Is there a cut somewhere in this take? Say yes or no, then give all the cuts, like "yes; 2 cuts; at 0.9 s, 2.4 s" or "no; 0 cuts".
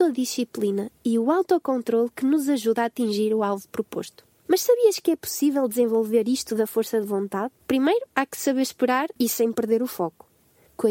yes; 2 cuts; at 7.6 s, 9.2 s